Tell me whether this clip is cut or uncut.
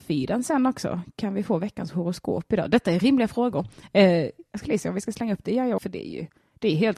cut